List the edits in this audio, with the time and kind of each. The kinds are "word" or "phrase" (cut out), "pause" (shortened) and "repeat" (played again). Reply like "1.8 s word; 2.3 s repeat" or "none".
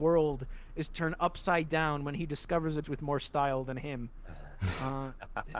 2.8 s word